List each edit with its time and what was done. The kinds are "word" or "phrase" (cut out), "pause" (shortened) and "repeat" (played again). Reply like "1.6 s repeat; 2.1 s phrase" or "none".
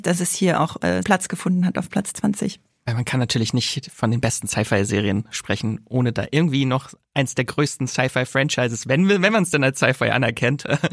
1.0 s word

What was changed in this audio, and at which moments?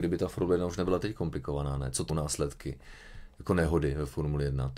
2.1 s word

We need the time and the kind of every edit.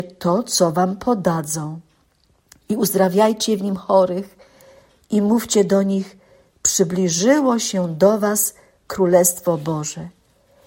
none

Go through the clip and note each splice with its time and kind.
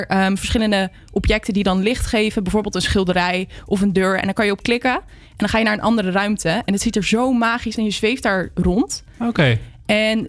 7.8 s word

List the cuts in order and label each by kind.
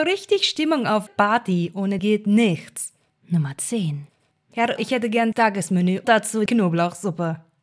1.1 s word; 2.0 s word; 4.8 s word; 5.3 s word; 6.0 s word; 6.5 s word

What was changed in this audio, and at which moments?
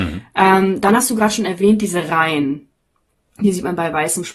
none

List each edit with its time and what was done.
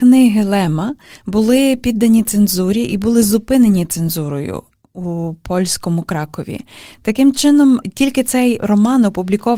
none

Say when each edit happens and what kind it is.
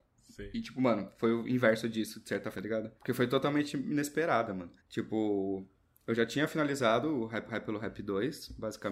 2.5 s word; 3.0 s pause; 4.8 s pause; 7.5 s repeat

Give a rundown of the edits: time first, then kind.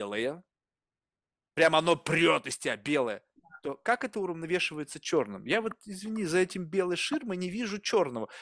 none

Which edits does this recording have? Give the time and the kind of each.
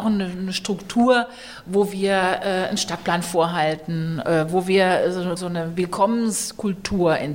5.4 s word

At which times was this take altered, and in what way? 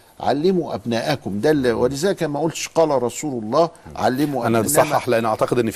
4.6 s phrase

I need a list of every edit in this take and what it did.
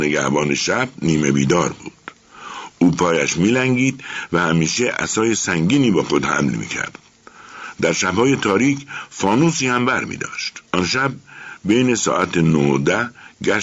10.7 s pause

